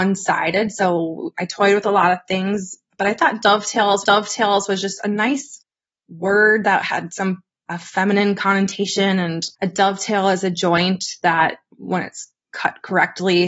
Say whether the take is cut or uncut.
cut